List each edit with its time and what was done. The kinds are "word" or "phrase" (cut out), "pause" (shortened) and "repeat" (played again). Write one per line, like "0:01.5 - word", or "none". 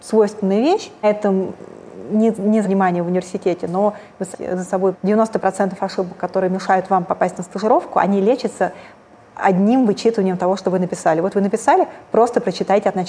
0:01.0 - phrase
0:02.6 - word
0:04.3 - phrase
0:04.9 - phrase